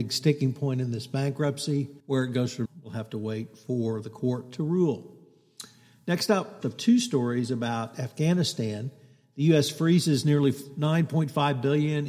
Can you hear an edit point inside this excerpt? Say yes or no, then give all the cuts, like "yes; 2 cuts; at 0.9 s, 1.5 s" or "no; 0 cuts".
yes; 3 cuts; at 2.0 s, 2.7 s, 6.6 s